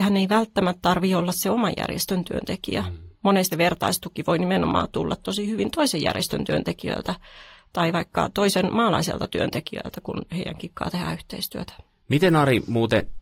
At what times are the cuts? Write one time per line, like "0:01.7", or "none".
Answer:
0:03.5